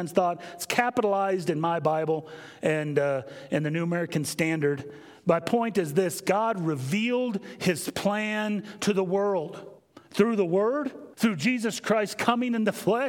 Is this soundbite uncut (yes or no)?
no